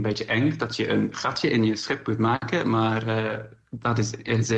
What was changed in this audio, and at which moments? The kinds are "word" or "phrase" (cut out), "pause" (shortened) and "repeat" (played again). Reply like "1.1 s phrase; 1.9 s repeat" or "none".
none